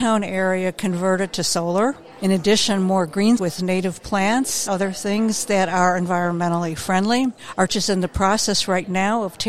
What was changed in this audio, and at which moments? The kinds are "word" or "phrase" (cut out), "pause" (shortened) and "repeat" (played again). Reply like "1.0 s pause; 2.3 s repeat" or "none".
3.4 s word; 4.7 s word; 7.7 s word